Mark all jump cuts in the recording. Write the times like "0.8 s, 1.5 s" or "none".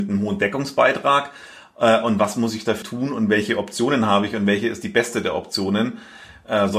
2.8 s